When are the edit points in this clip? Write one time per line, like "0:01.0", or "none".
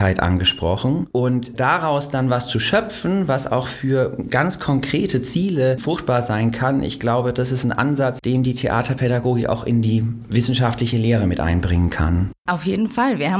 0:12.4